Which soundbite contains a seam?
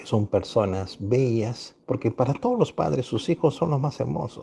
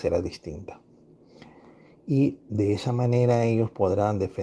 first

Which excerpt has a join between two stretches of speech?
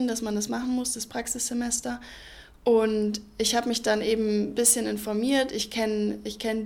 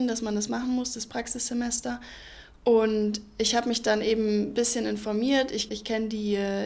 second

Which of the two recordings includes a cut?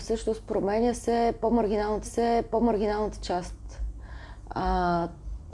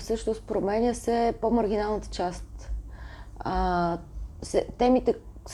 first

